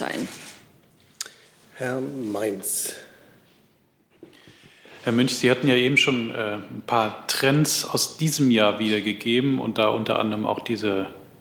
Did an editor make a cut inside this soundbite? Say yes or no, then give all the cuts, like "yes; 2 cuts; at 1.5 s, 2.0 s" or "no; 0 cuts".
no; 0 cuts